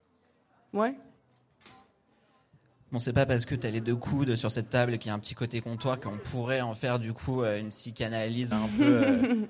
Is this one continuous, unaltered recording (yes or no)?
no